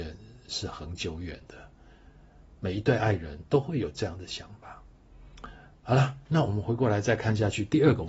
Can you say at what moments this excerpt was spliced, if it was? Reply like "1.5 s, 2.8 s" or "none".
5.7 s